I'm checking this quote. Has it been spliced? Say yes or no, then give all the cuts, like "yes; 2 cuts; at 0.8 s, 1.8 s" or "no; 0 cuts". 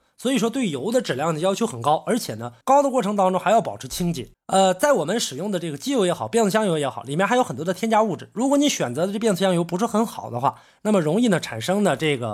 yes; 2 cuts; at 2.6 s, 4.3 s